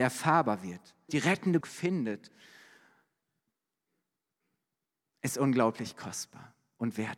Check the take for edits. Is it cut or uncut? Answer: cut